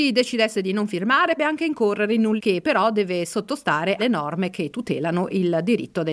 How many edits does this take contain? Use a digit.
3